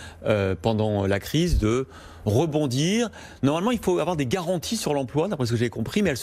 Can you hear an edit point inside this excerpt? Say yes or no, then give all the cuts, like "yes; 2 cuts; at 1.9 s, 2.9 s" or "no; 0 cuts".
no; 0 cuts